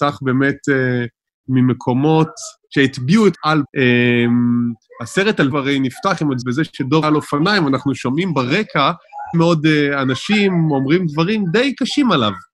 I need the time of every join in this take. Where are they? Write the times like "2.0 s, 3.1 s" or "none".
2.6 s, 3.3 s, 3.6 s, 5.5 s, 6.4 s, 7.0 s, 9.3 s